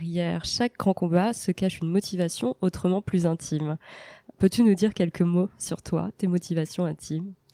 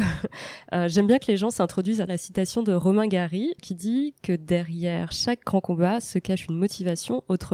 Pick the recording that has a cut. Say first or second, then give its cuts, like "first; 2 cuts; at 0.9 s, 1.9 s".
second; 2 cuts; at 2.1 s, 3.6 s